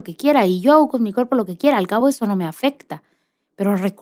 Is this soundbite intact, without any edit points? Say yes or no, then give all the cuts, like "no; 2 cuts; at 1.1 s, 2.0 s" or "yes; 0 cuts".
yes; 0 cuts